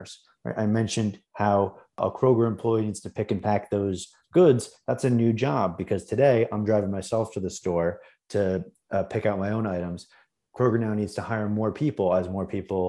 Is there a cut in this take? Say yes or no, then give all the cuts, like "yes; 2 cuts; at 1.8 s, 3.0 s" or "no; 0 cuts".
no; 0 cuts